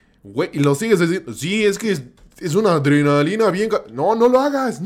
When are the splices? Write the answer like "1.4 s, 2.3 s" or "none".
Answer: none